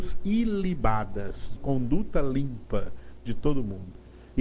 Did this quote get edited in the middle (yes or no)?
yes